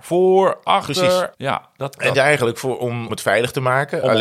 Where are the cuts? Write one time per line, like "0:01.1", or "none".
0:01.3
0:02.1
0:03.1